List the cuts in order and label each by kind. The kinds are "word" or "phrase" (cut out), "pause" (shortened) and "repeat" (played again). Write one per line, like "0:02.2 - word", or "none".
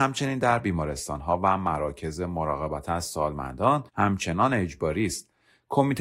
0:03.9 - pause